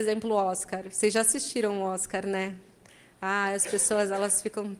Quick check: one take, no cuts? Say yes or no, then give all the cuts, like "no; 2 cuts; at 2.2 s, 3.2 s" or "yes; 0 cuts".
yes; 0 cuts